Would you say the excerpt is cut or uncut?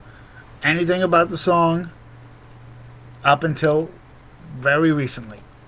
uncut